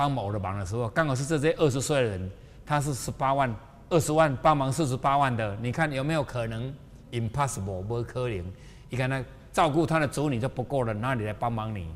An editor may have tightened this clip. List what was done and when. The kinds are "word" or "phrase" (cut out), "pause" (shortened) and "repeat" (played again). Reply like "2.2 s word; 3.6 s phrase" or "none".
none